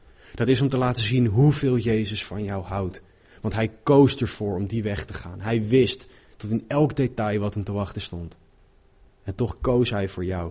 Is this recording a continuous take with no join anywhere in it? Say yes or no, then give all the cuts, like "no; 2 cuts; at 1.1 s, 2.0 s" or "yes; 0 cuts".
yes; 0 cuts